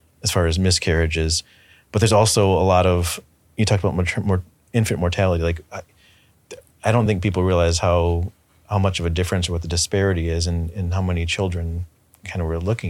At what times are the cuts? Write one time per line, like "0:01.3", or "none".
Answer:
none